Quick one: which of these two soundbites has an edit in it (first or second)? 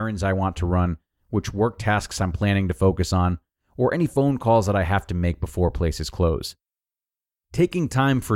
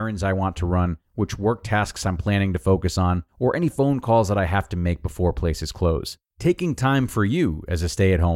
second